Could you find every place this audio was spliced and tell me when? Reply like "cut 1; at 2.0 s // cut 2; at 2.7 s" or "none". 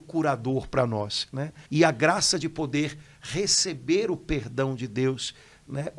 cut 1; at 1.6 s